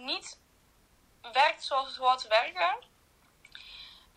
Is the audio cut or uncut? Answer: uncut